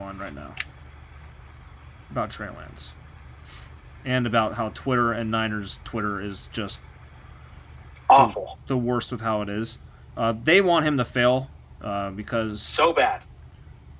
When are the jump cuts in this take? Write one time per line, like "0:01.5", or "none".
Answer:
none